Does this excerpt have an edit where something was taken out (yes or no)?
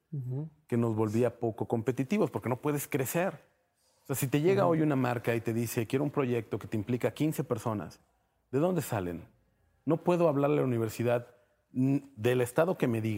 no